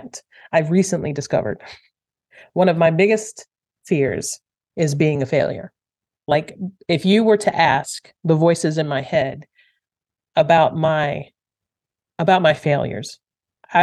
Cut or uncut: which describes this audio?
uncut